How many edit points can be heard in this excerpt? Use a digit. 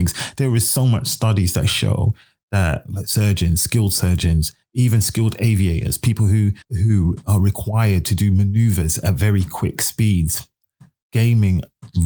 1